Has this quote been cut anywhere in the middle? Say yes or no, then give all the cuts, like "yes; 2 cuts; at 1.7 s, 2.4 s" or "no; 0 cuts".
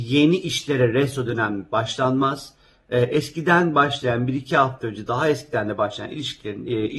no; 0 cuts